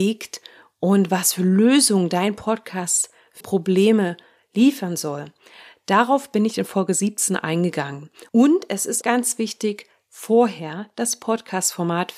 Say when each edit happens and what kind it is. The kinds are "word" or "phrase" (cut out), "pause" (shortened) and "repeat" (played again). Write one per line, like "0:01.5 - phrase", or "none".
0:03.4 - word
0:08.3 - pause
0:09.0 - word